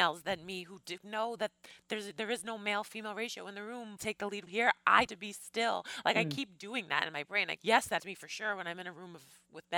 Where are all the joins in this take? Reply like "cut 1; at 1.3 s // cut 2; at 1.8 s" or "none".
cut 1; at 1.0 s // cut 2; at 4.0 s // cut 3; at 4.5 s // cut 4; at 5.1 s // cut 5; at 7.6 s // cut 6; at 8.0 s